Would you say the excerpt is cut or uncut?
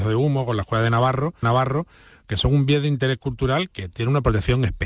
cut